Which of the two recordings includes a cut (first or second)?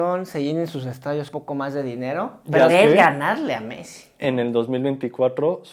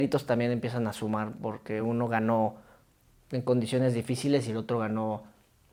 first